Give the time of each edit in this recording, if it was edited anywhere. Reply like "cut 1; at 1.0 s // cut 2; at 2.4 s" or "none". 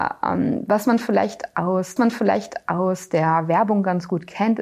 cut 1; at 2.0 s